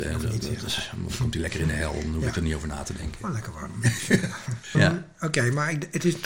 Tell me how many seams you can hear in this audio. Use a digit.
1